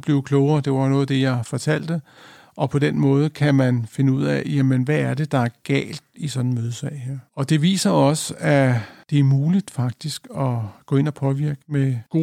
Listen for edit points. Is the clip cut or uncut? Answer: uncut